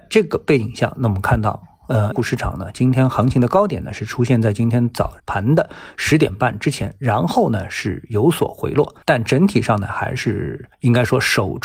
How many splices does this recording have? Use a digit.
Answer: 4